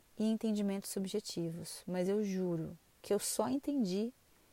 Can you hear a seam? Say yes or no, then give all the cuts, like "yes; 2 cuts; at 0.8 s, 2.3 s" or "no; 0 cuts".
no; 0 cuts